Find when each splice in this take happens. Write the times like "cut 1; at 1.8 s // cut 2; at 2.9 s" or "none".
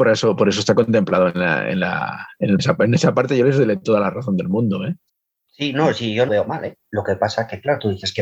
cut 1; at 2.6 s // cut 2; at 5.1 s // cut 3; at 6.3 s